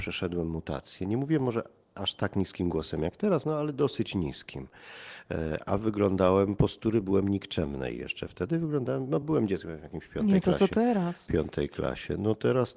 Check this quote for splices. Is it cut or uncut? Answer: uncut